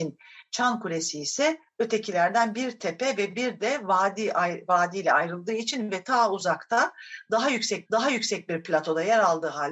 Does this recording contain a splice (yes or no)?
yes